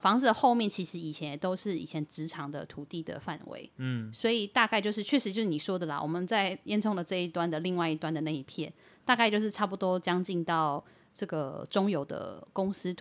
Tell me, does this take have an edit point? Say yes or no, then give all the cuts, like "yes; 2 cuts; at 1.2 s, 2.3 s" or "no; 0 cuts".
no; 0 cuts